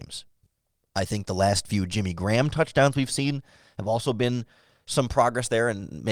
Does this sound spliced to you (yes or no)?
no